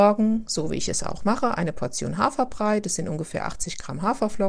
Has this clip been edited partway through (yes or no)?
no